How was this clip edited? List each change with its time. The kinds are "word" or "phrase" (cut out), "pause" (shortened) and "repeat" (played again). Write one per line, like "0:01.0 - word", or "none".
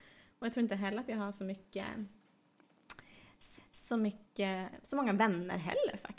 0:03.6 - repeat